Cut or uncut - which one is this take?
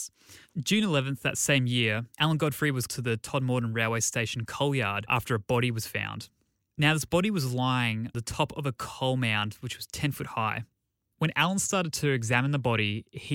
cut